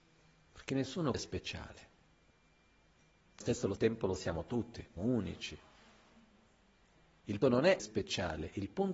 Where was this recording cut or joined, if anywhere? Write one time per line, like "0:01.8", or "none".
0:01.1
0:03.4
0:03.8
0:05.0
0:07.4
0:07.8